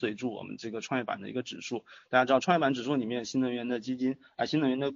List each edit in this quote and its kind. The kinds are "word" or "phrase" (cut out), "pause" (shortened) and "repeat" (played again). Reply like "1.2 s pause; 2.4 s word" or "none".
none

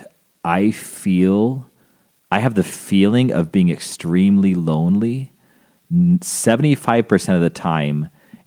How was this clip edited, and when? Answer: none

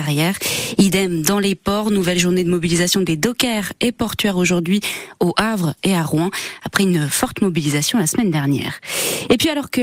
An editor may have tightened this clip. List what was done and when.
none

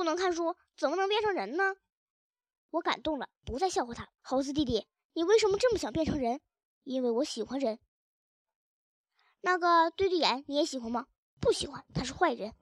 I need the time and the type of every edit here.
4.2 s pause

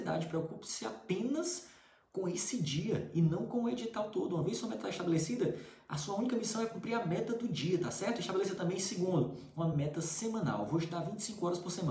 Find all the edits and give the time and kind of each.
none

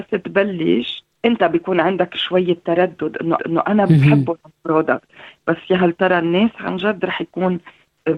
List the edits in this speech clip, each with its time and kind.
1.1 s pause; 3.4 s repeat

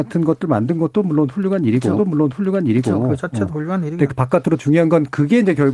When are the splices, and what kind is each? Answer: 2.0 s repeat; 4.1 s word; 4.6 s phrase

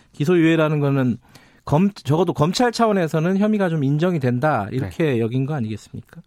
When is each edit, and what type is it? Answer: none

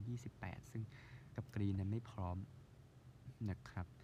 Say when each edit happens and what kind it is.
1.4 s word

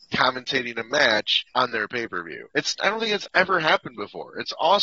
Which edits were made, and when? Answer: 1.5 s pause; 2.5 s pause

